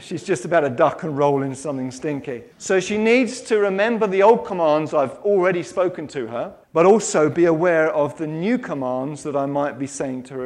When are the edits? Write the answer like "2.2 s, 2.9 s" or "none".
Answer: 2.5 s, 6.6 s